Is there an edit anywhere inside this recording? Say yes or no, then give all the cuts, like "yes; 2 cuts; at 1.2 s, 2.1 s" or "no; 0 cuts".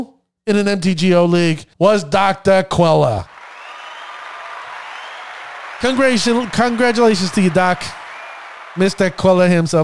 yes; 1 cut; at 1.7 s